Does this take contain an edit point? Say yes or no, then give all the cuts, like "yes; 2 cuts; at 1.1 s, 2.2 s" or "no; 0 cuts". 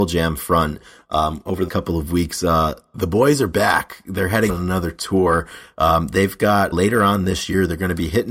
yes; 3 cuts; at 1.7 s, 4.5 s, 6.7 s